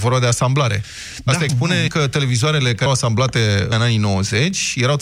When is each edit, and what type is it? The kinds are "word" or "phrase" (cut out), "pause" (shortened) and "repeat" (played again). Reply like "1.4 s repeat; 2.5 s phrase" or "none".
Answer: 1.5 s phrase; 1.9 s word; 2.9 s word; 3.7 s word